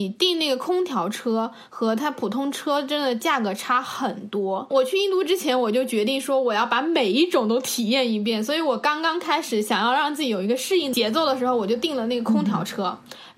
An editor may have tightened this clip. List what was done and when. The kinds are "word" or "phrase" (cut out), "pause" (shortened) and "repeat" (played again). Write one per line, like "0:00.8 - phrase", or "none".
none